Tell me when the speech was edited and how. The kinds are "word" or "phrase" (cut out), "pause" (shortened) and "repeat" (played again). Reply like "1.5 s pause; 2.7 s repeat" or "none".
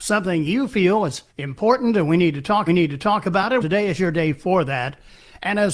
1.3 s pause; 2.7 s repeat; 3.6 s word